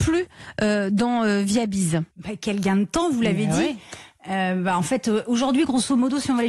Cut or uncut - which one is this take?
cut